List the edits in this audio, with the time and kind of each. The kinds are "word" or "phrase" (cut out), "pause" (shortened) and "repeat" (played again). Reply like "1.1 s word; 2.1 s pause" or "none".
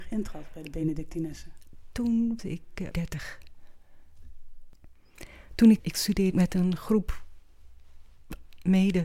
2.4 s word; 2.9 s word; 5.8 s word; 6.3 s phrase